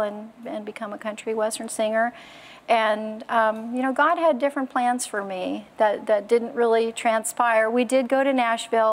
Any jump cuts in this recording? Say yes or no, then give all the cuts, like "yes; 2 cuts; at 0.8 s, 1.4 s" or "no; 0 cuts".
no; 0 cuts